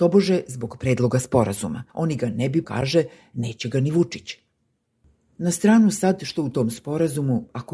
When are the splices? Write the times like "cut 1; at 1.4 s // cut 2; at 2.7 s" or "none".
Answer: cut 1; at 1.9 s // cut 2; at 2.6 s